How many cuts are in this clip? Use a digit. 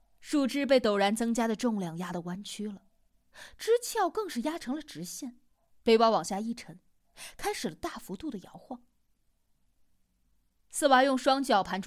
1